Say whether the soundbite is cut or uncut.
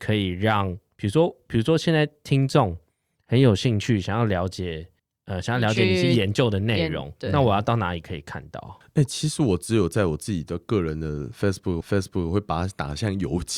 cut